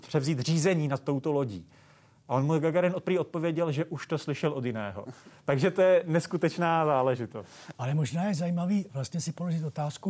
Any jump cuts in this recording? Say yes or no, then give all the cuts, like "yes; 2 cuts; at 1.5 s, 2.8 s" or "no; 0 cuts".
no; 0 cuts